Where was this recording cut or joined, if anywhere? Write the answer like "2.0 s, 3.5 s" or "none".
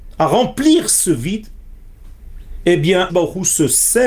3.1 s